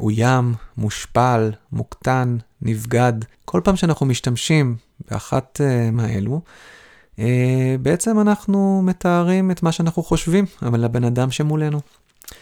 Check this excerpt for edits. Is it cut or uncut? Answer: cut